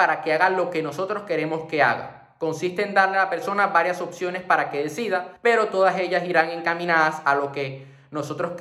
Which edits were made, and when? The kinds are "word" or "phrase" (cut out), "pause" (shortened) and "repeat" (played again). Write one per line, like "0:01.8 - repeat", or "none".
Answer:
0:05.4 - pause